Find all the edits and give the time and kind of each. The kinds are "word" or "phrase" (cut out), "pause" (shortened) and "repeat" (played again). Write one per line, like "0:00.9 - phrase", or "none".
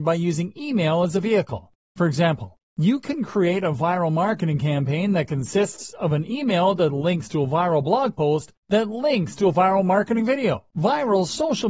0:10.7 - pause